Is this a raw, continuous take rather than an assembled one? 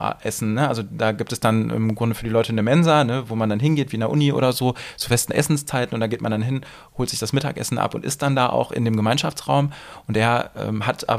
yes; 0 cuts

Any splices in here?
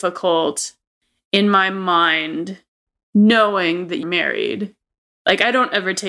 yes; 1 cut; at 4.0 s

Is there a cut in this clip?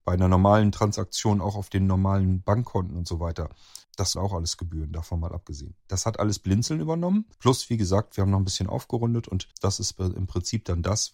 yes; 4 cuts; at 3.8 s, 4.1 s, 7.3 s, 9.5 s

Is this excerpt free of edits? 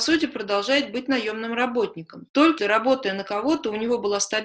no; 1 cut; at 2.6 s

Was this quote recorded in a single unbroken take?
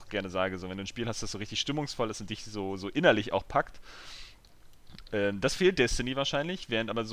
yes; 0 cuts

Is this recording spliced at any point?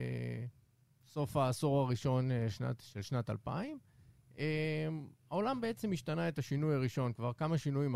no; 0 cuts

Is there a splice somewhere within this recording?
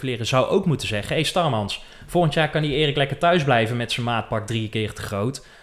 no; 0 cuts

